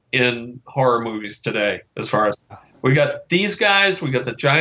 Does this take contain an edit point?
yes; 2 cuts; at 1.9 s, 2.5 s

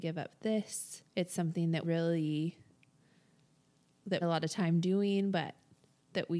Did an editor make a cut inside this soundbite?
yes; 3 cuts; at 1.1 s, 1.8 s, 4.2 s

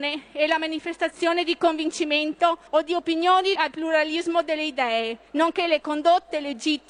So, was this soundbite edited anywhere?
yes; 3 cuts; at 2.7 s, 3.5 s, 5.3 s

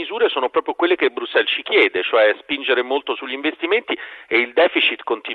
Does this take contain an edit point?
no; 0 cuts

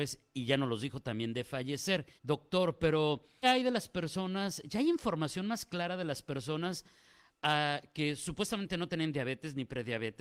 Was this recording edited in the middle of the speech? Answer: yes; 2 cuts; at 2.2 s, 3.4 s

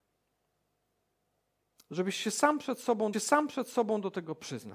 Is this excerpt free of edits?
no; 1 cut; at 3.1 s

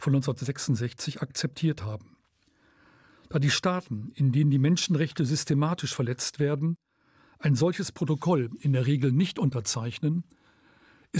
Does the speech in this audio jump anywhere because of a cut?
no; 0 cuts

